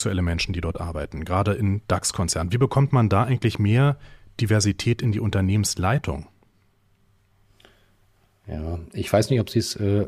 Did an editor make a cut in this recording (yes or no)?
no